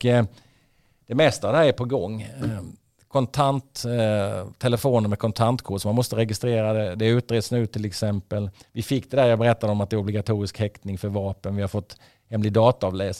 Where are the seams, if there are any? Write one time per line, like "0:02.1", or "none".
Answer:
none